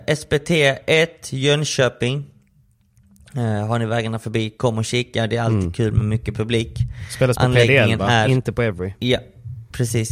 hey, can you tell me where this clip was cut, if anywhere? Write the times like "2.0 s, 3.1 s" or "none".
none